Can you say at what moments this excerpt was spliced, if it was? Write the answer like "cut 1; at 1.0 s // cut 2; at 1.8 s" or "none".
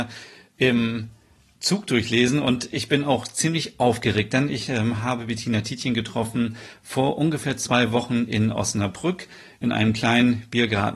none